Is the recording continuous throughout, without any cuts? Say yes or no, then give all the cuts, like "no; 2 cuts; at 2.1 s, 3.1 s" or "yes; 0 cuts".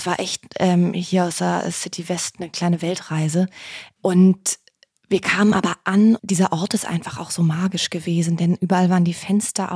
yes; 0 cuts